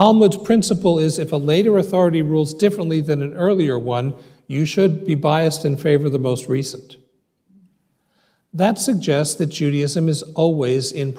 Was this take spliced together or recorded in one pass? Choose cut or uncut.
uncut